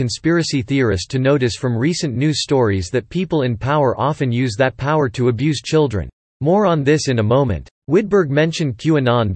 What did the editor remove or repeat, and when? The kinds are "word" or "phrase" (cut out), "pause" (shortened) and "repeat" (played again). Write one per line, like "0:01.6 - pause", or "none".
0:06.3 - pause
0:07.8 - pause